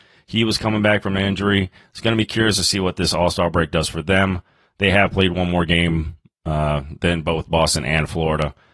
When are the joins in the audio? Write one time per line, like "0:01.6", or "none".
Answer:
none

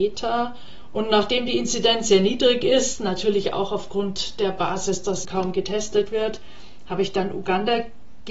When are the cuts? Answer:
0:05.2

